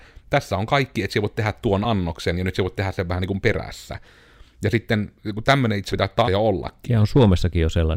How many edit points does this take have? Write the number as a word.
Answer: two